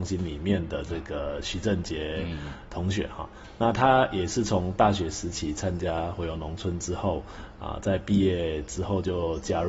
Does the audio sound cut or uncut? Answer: uncut